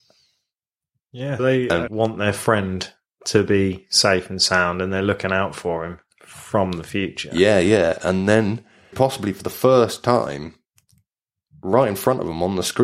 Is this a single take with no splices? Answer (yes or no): no